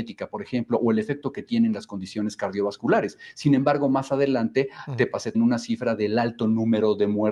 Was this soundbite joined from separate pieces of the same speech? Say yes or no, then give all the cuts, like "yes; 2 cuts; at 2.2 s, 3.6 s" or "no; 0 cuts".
yes; 1 cut; at 5.3 s